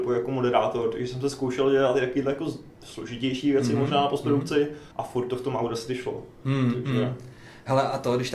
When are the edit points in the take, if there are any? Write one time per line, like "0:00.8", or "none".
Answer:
0:02.7
0:04.9